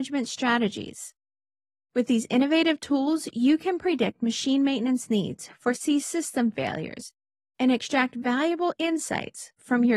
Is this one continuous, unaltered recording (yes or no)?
yes